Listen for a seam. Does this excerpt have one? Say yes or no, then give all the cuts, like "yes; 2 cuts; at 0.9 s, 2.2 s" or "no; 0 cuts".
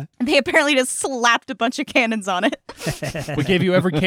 no; 0 cuts